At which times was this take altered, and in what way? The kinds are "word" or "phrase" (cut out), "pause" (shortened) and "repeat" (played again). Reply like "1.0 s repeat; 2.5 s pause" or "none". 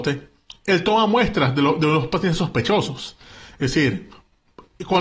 none